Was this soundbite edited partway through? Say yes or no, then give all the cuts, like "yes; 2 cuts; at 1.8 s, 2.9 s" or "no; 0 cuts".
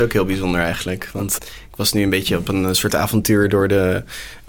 yes; 1 cut; at 1.4 s